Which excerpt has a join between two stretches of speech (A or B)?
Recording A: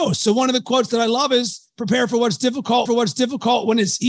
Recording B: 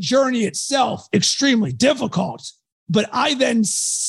A